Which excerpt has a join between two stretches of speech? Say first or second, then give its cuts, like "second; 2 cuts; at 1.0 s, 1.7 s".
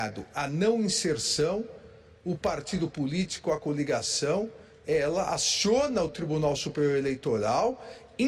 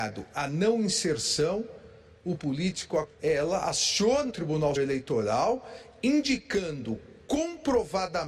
second; 4 cuts; at 2.4 s, 3.1 s, 4.3 s, 4.8 s